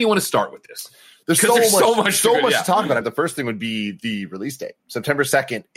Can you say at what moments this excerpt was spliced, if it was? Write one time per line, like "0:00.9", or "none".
0:03.0